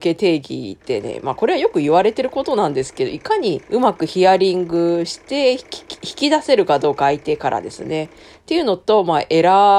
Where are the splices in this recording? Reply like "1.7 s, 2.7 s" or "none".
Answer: 3.7 s